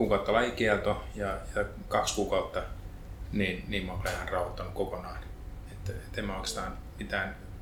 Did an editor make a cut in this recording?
no; 0 cuts

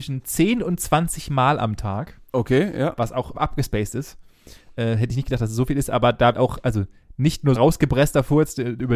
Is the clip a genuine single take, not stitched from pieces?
no; 4 cuts; at 2.3 s, 3.3 s, 6.3 s, 7.5 s

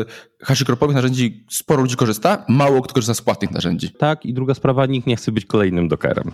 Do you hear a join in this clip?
no; 0 cuts

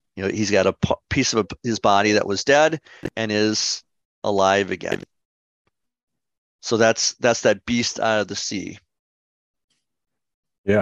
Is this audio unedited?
yes; 0 cuts

